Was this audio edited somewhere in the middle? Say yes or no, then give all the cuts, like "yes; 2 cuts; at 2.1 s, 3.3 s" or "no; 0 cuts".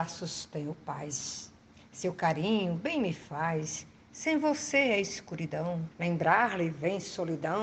yes; 1 cut; at 5.9 s